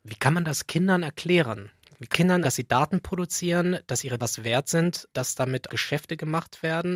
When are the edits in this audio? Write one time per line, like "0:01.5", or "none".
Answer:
0:02.1
0:02.4
0:04.2
0:05.1
0:05.7